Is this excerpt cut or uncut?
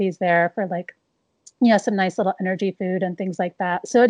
uncut